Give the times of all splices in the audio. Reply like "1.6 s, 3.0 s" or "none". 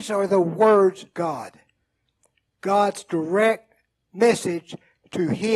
1.1 s